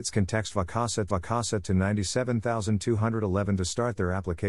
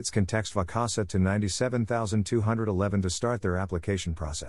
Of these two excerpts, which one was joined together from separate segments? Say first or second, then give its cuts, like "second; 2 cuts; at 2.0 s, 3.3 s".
first; 1 cut; at 1.1 s